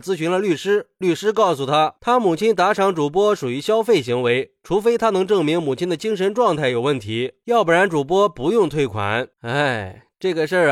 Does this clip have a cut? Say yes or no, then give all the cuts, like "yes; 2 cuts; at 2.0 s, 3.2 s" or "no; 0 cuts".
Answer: yes; 1 cut; at 9.3 s